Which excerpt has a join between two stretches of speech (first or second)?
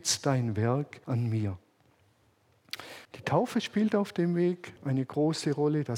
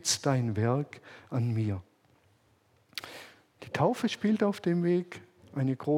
first